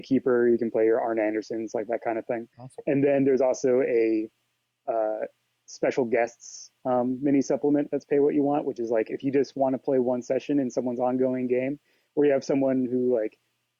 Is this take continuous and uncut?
no; 1 cut; at 2.5 s

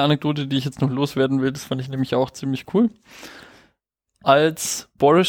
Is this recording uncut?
yes; 0 cuts

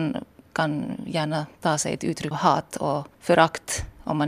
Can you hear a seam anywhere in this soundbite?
yes; 3 cuts; at 1.5 s, 2.3 s, 3.1 s

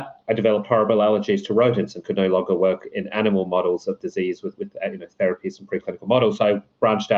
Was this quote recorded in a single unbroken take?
no; 1 cut; at 2.9 s

